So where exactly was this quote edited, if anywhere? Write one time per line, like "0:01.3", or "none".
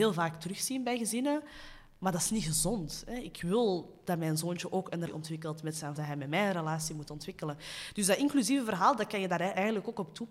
0:05.1
0:06.0